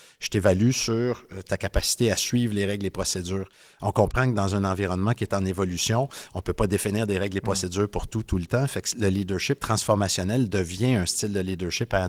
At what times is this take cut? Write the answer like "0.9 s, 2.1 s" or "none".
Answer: none